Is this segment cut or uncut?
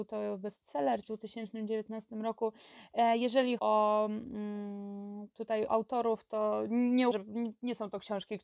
cut